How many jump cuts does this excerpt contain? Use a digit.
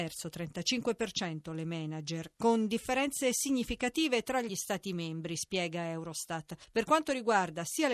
0